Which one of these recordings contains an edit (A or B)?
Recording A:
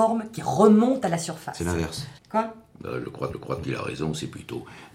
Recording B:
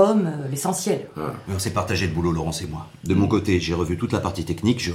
A